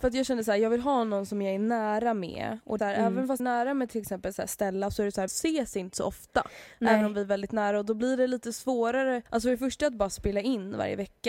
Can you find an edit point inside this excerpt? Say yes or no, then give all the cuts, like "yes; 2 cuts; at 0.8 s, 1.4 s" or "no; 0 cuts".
yes; 4 cuts; at 2.8 s, 3.4 s, 5.3 s, 9.3 s